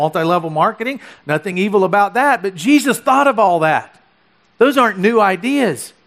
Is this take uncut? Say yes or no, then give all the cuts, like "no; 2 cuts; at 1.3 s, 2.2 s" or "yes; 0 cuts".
yes; 0 cuts